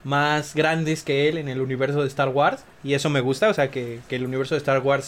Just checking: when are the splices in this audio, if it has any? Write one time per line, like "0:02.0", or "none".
0:02.7